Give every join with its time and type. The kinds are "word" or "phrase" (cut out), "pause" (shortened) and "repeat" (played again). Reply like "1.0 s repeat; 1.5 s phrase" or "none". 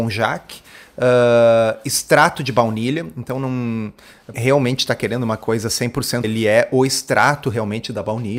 4.3 s phrase; 6.2 s word